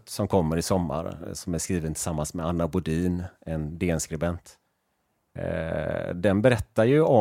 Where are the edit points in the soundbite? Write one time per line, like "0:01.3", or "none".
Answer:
none